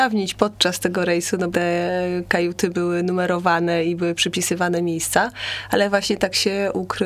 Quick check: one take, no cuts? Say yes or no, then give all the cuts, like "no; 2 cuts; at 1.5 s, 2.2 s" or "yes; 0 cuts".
no; 1 cut; at 1.5 s